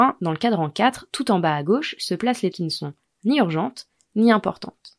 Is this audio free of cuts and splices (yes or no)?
no